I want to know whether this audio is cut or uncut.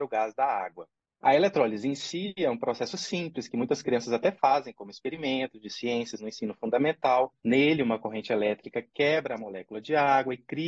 uncut